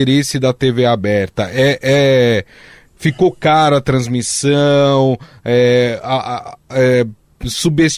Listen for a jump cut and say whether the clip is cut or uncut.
uncut